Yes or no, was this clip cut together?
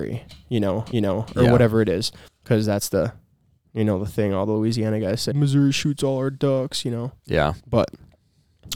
yes